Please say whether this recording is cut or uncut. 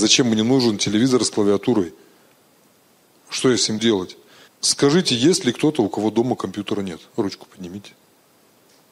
cut